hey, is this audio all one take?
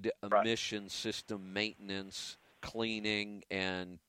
no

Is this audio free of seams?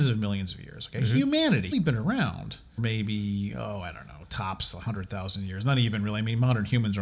no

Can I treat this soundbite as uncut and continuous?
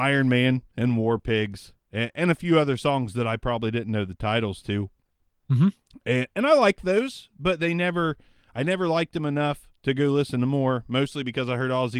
yes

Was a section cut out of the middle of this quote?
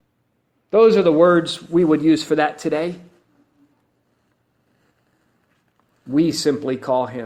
no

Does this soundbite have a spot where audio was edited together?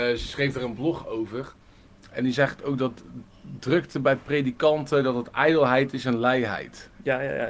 no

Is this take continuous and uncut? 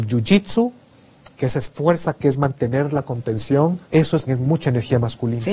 no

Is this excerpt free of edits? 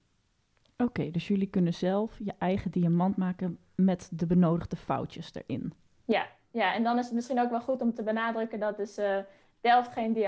yes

